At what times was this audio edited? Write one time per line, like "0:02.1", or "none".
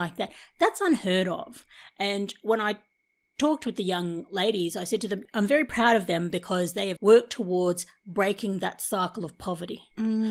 0:07.0